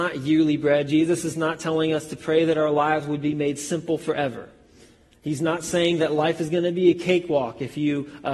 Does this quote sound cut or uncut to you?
uncut